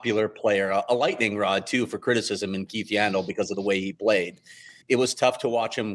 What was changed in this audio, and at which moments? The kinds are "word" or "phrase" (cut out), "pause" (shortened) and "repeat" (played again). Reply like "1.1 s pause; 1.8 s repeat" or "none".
4.8 s pause